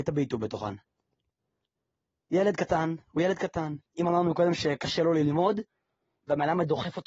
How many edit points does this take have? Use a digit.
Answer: 1